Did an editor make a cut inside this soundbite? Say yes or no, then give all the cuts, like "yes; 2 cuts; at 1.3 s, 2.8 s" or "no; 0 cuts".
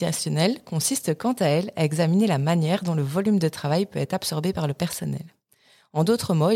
no; 0 cuts